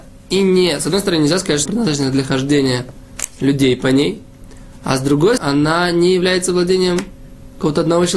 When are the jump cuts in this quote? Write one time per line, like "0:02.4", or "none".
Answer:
0:01.7
0:05.4